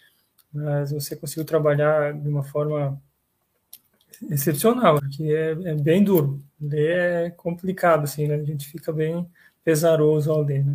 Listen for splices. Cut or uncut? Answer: cut